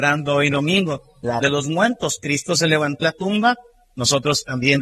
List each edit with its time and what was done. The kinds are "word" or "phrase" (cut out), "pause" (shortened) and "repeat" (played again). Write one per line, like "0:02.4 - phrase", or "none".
0:01.4 - word
0:03.0 - word